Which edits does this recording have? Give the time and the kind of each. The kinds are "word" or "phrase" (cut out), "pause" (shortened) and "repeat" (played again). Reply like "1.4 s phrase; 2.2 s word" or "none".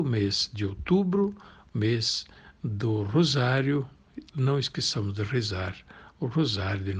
none